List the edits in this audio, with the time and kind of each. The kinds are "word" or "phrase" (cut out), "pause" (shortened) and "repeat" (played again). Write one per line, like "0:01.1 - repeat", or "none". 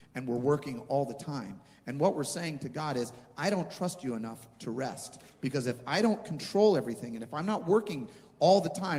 none